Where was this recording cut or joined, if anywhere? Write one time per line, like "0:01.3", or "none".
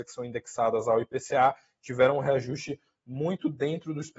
none

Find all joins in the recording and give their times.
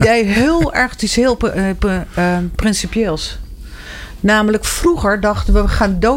none

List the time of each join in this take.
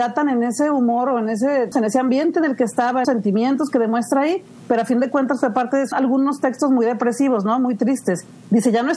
0:01.7
0:03.0
0:05.9

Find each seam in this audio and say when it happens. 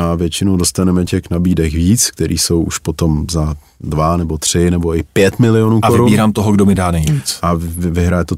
none

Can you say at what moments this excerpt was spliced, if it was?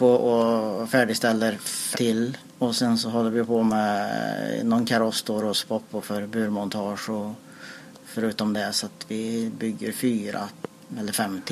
0:01.9

